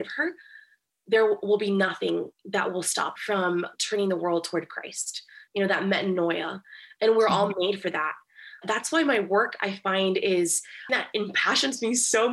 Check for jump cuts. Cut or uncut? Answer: cut